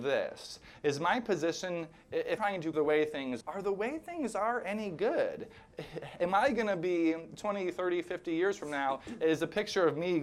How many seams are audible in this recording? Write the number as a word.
three